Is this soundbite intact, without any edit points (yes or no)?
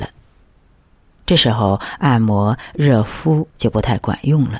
no